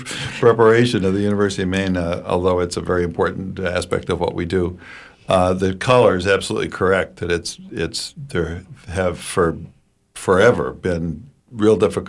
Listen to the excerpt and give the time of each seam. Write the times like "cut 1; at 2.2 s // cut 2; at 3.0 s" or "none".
none